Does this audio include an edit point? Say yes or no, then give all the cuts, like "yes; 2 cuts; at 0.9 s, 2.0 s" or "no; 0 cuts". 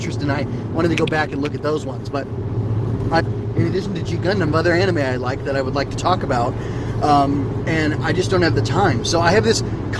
yes; 2 cuts; at 3.2 s, 4.5 s